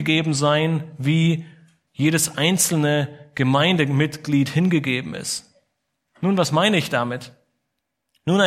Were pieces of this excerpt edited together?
no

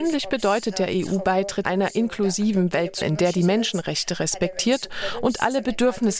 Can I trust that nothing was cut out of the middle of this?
no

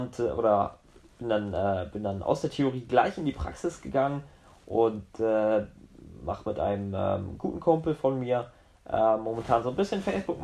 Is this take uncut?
yes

